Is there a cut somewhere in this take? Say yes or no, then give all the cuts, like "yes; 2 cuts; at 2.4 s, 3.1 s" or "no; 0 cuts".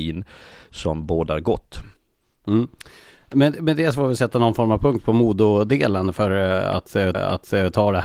yes; 2 cuts; at 2.0 s, 7.1 s